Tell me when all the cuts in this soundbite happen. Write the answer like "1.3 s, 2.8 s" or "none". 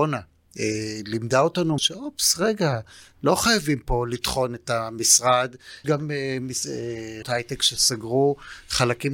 1.8 s, 5.8 s, 7.2 s